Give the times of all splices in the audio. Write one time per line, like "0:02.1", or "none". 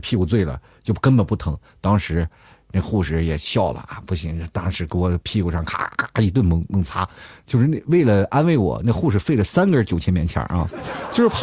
none